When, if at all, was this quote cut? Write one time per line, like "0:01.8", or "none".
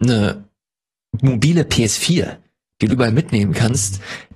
0:02.9

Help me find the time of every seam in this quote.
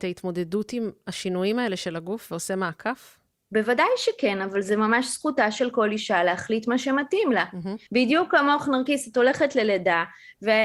0:03.3
0:07.9

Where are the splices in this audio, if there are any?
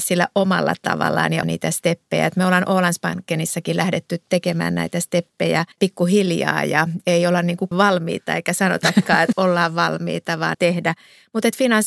0:01.4
0:05.7
0:07.7
0:09.3
0:10.5

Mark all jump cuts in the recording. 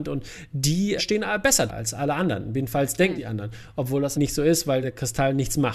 0:01.0
0:01.7
0:03.2
0:04.1
0:04.8

